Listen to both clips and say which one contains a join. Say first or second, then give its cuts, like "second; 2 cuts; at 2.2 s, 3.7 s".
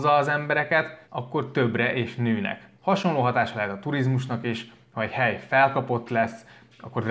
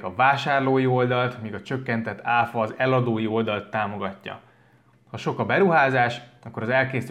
first; 1 cut; at 1.0 s